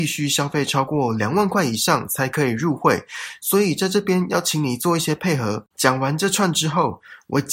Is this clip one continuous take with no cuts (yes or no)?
no